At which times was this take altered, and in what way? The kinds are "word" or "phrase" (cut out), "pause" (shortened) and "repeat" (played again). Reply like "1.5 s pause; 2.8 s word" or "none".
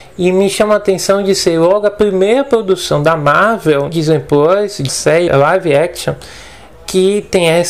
3.9 s word; 4.9 s word; 5.3 s word